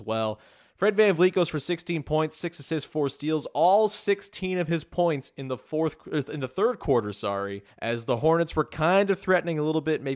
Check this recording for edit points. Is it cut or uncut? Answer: cut